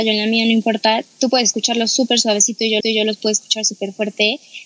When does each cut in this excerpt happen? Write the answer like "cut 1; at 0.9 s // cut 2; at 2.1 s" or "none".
cut 1; at 2.8 s